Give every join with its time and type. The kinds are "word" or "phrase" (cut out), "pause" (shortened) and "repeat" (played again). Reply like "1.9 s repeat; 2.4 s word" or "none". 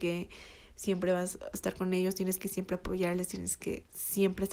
none